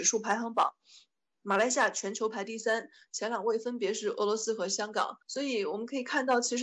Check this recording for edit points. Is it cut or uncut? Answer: cut